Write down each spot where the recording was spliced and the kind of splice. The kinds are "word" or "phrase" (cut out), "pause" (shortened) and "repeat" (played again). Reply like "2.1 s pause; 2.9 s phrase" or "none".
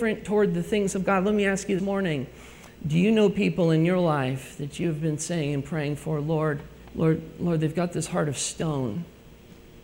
1.8 s word; 6.8 s pause